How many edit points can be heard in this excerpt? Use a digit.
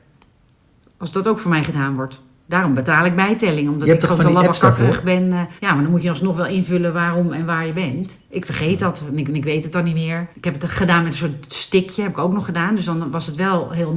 5